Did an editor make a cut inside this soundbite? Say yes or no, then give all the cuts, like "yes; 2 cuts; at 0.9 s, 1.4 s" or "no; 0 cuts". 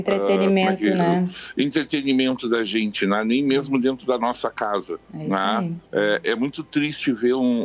yes; 2 cuts; at 5.0 s, 5.8 s